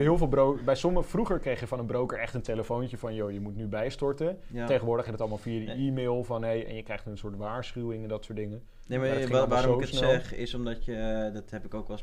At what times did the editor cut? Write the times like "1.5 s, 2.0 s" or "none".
5.1 s